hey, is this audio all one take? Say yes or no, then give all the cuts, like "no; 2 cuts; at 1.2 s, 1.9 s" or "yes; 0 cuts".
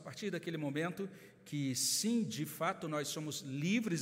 yes; 0 cuts